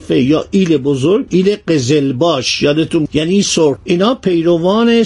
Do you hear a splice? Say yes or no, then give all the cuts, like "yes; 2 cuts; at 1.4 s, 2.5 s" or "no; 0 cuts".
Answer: yes; 3 cuts; at 1.3 s, 3.1 s, 3.8 s